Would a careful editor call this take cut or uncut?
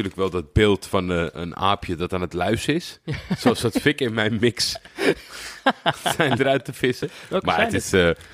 cut